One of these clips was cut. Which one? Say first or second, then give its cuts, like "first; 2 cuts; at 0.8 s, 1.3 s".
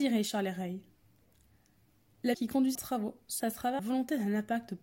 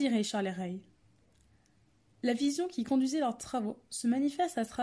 first; 4 cuts; at 2.3 s, 2.7 s, 3.4 s, 3.8 s